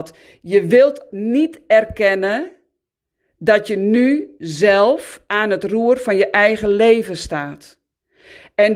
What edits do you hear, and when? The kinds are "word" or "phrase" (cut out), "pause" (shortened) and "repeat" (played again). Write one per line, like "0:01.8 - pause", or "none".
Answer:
0:01.1 - word